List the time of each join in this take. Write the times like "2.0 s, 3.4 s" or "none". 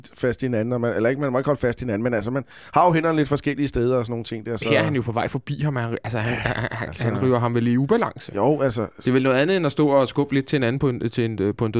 none